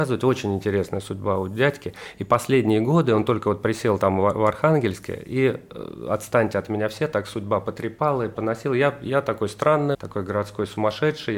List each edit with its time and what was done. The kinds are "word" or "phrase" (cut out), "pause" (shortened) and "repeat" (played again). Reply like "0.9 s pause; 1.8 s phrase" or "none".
9.9 s word